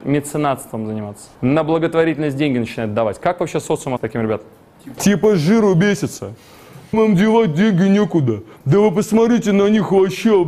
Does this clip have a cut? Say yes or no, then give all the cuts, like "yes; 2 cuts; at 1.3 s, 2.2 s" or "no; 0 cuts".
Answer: yes; 4 cuts; at 1.3 s, 4.0 s, 5.0 s, 6.9 s